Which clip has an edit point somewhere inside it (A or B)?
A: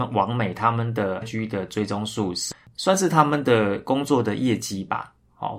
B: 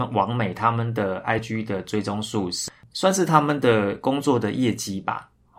A